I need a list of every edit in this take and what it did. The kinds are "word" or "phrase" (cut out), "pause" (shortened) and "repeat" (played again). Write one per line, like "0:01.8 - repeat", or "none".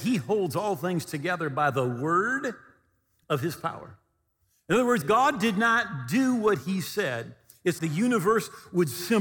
0:05.0 - word
0:07.8 - word